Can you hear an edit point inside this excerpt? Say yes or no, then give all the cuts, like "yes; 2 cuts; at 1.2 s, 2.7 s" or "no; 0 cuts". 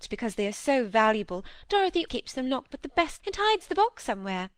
yes; 3 cuts; at 2.1 s, 2.7 s, 3.2 s